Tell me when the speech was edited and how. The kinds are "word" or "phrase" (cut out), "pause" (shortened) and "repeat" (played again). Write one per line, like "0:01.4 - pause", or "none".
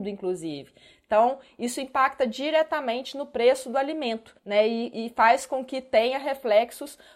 0:04.4 - pause